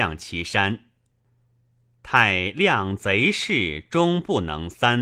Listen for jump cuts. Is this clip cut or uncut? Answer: uncut